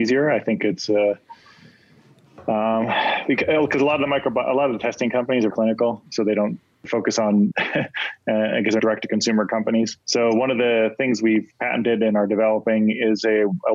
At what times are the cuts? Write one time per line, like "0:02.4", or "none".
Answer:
0:05.5
0:06.1
0:06.8
0:07.5
0:08.8
0:10.0